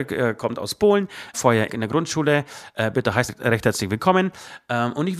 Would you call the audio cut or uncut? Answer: cut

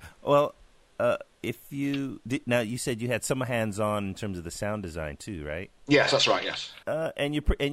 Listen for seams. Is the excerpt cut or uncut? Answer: cut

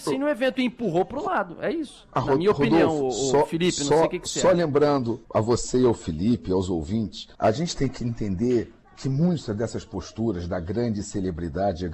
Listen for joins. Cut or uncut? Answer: cut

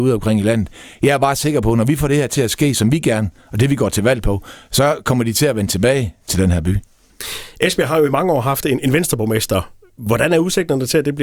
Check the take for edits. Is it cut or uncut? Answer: uncut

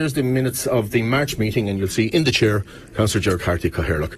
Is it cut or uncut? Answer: uncut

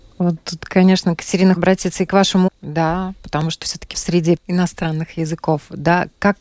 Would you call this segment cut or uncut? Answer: cut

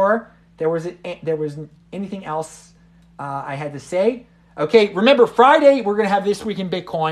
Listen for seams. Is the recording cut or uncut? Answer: uncut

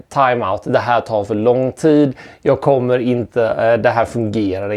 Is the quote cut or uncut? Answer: uncut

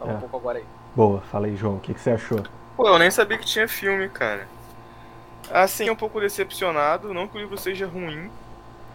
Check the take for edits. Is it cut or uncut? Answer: cut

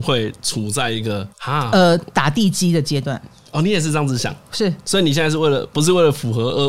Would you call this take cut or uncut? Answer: cut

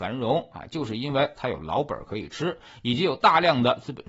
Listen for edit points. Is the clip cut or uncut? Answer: uncut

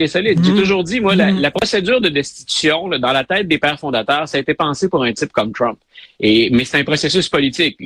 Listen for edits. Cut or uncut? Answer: uncut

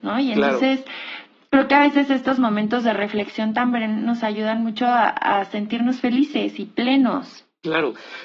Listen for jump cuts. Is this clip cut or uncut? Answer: uncut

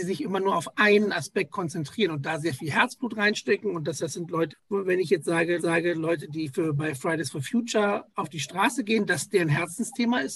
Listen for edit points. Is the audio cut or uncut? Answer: cut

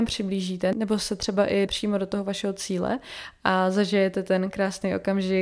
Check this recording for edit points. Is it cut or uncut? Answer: cut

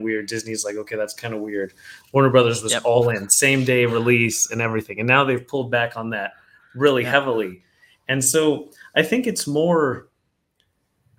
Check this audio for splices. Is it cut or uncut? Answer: uncut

